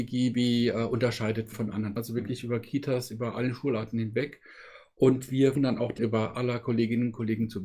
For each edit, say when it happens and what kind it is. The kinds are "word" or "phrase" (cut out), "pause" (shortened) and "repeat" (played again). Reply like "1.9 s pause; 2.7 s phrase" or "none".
1.5 s word; 2.0 s word; 5.6 s word; 6.0 s word; 6.3 s word